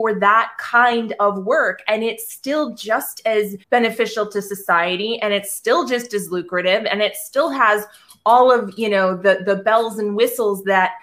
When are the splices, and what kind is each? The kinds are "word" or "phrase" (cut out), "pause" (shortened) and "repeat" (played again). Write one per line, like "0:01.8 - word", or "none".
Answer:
0:03.6 - pause